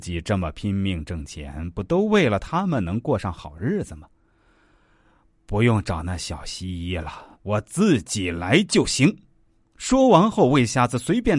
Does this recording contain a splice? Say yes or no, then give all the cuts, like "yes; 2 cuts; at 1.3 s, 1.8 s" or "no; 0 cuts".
yes; 1 cut; at 7.3 s